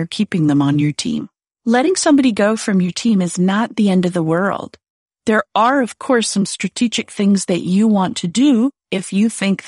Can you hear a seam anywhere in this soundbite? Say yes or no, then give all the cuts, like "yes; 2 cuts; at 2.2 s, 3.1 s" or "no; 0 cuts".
no; 0 cuts